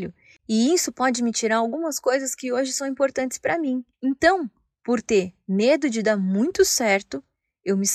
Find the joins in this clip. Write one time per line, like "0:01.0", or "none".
0:03.9